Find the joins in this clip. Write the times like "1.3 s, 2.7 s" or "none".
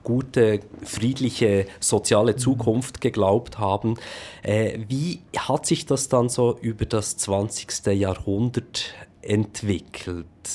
none